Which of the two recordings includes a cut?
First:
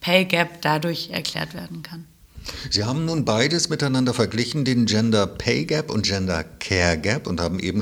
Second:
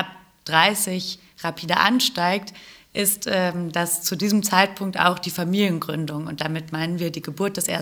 first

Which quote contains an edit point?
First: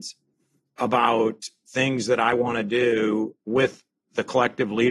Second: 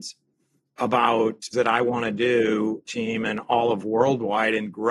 second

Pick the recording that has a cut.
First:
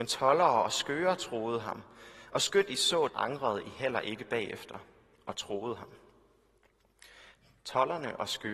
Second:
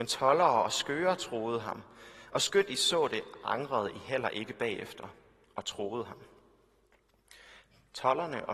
first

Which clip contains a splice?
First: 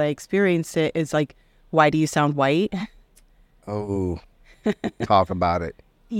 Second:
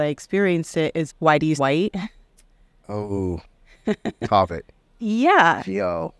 second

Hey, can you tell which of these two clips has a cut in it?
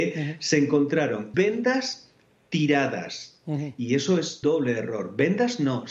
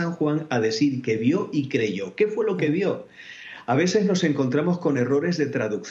first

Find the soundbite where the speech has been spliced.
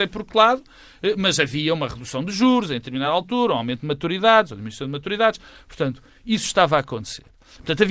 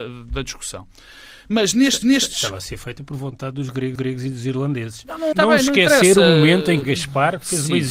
second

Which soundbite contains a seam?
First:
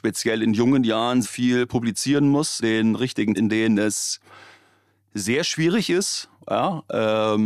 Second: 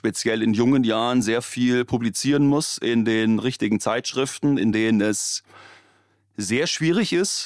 first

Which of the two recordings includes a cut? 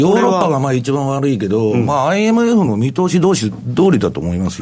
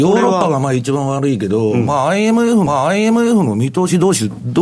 second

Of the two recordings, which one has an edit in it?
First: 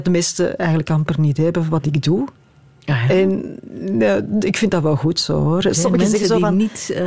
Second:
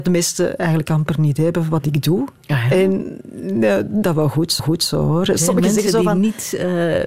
second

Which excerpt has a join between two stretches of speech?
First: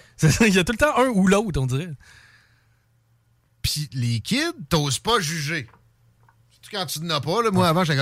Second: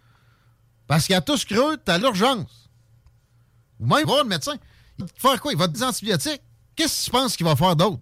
second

